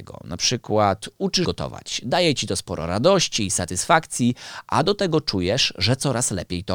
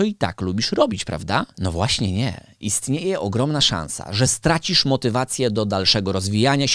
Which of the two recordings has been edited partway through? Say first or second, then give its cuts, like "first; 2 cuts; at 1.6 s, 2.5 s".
first; 1 cut; at 1.4 s